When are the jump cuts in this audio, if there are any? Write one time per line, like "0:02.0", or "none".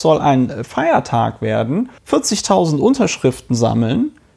0:02.0